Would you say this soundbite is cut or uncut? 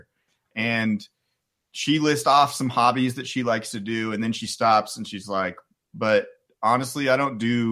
uncut